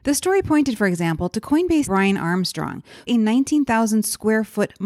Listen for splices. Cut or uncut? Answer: cut